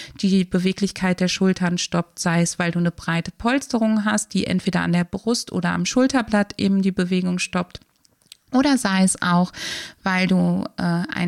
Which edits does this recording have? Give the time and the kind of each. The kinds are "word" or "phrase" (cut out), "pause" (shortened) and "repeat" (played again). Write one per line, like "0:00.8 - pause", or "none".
none